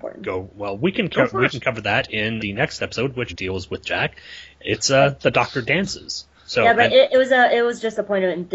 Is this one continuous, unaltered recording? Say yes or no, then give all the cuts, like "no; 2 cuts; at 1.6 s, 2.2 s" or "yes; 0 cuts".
no; 2 cuts; at 2.4 s, 3.3 s